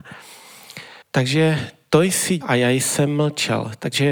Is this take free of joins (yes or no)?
no